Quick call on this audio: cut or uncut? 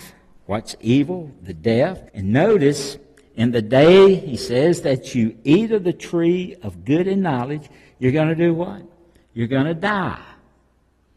cut